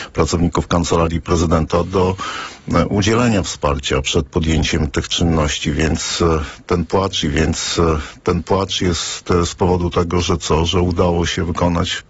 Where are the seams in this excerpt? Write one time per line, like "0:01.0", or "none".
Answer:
0:07.2